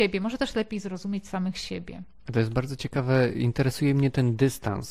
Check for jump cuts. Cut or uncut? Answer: uncut